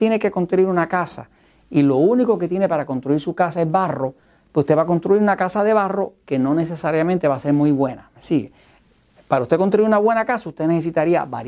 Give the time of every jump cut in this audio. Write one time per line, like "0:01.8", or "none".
none